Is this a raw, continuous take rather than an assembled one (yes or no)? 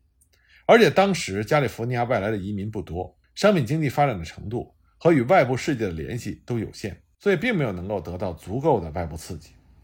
no